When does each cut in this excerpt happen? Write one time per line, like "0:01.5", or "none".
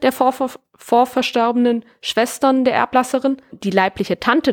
0:03.5